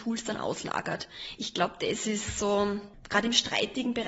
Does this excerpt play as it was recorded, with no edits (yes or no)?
yes